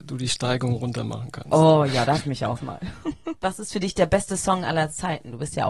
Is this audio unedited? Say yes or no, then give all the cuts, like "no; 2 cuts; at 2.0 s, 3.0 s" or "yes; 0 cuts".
no; 2 cuts; at 2.2 s, 2.6 s